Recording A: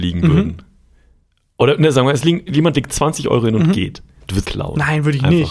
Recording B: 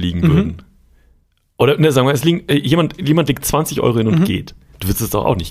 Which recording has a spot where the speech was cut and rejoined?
A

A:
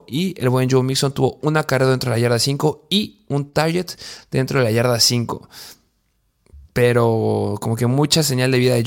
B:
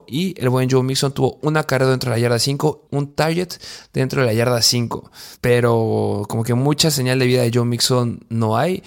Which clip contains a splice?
B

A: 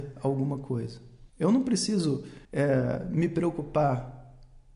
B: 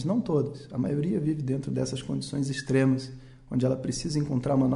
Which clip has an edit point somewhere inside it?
A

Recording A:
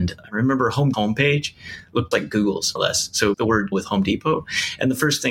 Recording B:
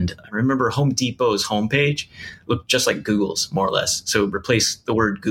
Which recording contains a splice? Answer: A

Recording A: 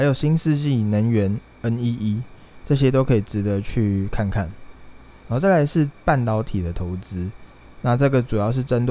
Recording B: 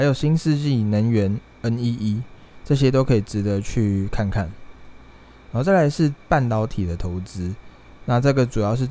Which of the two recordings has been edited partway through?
A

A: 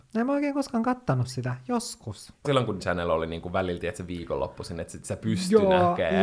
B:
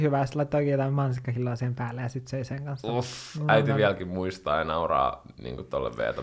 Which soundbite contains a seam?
A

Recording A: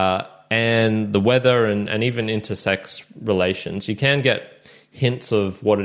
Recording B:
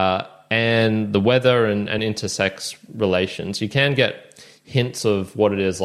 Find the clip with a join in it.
B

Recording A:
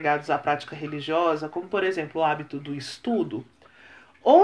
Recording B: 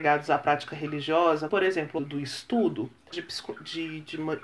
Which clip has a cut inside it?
B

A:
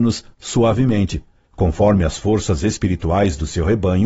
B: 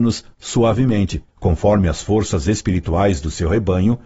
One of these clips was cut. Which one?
B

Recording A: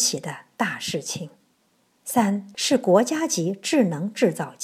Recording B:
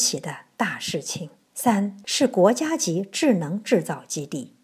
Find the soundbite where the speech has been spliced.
B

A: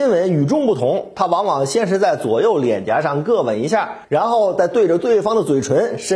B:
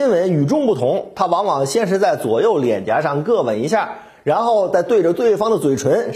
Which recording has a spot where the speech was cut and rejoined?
A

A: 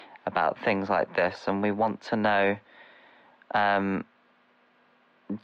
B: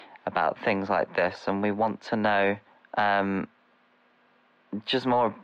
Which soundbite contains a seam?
B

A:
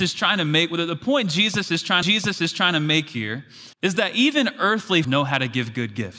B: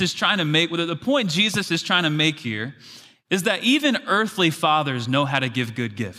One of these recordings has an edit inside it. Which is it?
A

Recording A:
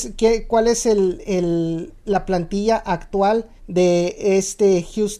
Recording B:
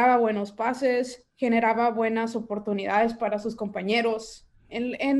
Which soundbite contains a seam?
A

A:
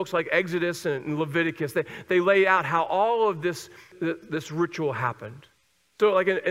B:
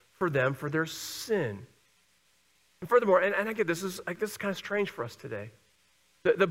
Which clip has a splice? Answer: A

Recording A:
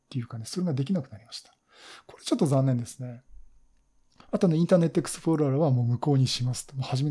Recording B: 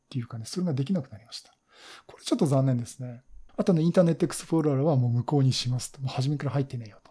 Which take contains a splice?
B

